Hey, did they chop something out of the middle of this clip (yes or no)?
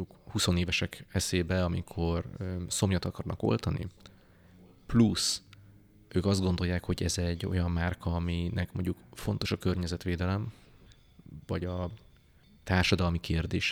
no